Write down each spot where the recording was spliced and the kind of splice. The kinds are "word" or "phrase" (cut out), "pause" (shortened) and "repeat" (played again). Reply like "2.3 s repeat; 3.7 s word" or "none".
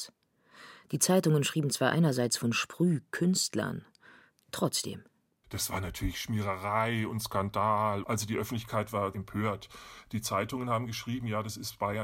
none